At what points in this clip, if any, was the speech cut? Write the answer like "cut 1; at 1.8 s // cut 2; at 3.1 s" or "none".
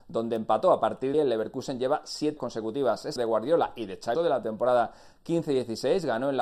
cut 1; at 1.1 s // cut 2; at 2.4 s // cut 3; at 3.2 s // cut 4; at 4.1 s